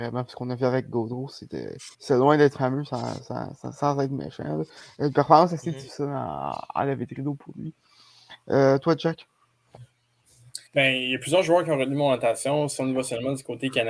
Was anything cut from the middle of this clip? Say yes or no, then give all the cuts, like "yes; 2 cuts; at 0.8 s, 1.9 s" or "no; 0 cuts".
yes; 2 cuts; at 1.9 s, 10.7 s